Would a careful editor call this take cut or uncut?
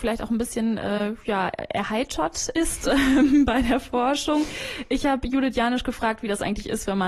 uncut